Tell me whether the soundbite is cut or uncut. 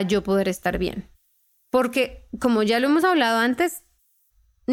uncut